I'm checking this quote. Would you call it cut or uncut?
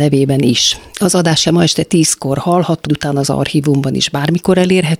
cut